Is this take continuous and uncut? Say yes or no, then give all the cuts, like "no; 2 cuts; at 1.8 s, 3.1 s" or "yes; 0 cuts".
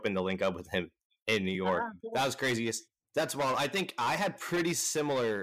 yes; 0 cuts